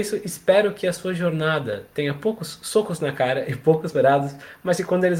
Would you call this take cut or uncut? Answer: cut